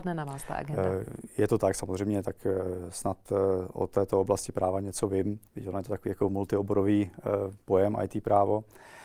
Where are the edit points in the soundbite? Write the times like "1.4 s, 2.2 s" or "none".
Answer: 5.5 s, 7.6 s